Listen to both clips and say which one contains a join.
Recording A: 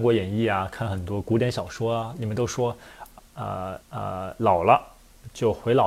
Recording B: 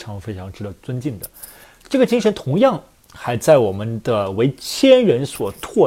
A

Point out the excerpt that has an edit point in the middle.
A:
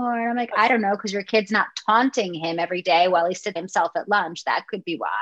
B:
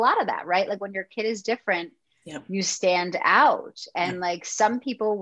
A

